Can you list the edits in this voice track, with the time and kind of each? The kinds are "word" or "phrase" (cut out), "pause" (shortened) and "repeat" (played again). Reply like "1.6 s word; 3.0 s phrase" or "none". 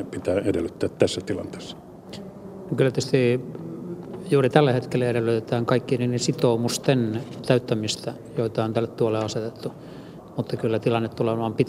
none